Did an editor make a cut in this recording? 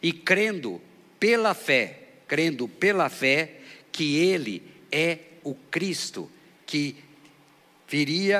no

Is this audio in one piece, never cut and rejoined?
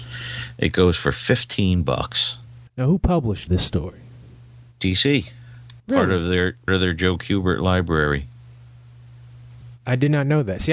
no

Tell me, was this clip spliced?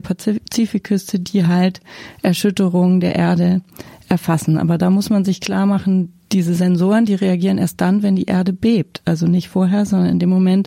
no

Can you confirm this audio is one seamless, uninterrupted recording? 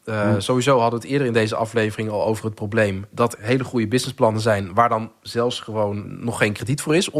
no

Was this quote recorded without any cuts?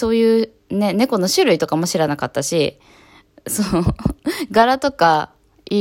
yes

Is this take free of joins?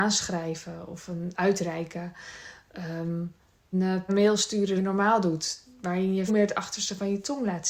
no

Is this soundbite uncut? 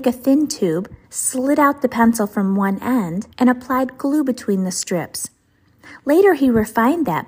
no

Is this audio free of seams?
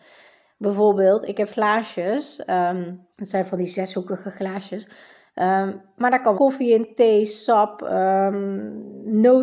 no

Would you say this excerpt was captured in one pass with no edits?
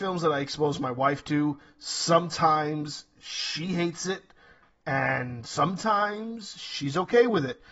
yes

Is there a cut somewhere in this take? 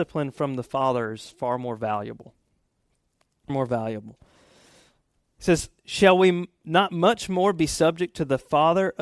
yes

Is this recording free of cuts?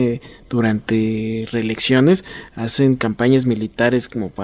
yes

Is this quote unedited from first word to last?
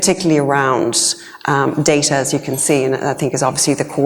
yes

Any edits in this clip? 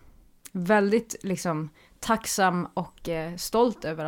no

